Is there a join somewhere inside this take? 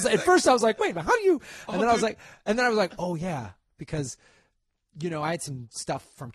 no; 0 cuts

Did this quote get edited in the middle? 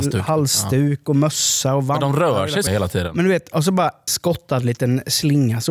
yes; 2 cuts; at 2.7 s, 4.1 s

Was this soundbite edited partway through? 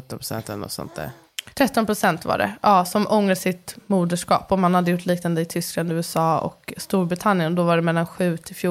yes; 1 cut; at 1.5 s

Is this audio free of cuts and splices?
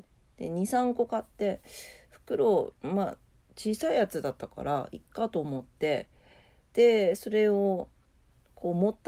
yes; 0 cuts

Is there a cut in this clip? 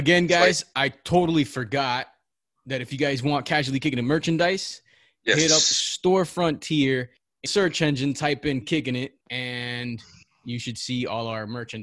yes; 3 cuts; at 7.5 s, 8.6 s, 9.2 s

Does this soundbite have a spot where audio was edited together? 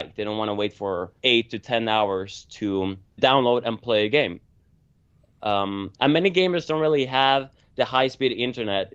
yes; 2 cuts; at 1.2 s, 3.2 s

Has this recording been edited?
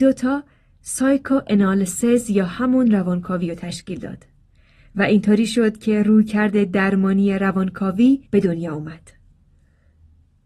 yes; 1 cut; at 8.3 s

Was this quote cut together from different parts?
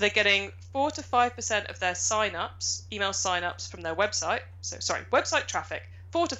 no; 0 cuts

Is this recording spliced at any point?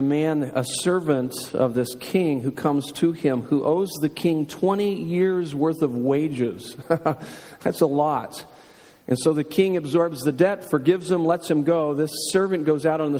no; 0 cuts

